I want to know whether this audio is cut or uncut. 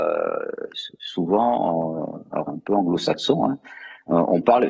cut